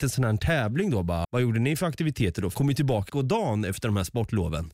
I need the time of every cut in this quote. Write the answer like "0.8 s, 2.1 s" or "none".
1.2 s, 2.5 s, 3.1 s